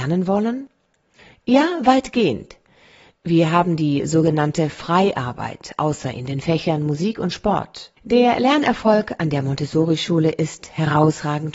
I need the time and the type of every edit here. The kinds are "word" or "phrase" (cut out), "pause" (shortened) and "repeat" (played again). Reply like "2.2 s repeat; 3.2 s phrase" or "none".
8.0 s pause